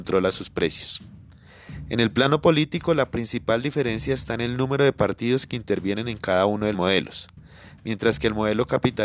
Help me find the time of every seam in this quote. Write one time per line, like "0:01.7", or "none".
0:06.7